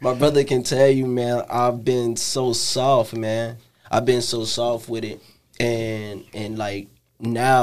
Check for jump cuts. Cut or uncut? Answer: uncut